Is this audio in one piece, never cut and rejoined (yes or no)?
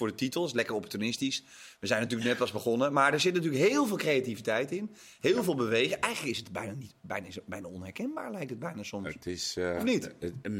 yes